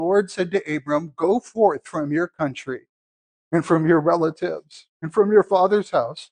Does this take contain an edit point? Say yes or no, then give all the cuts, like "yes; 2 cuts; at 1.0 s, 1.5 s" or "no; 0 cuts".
no; 0 cuts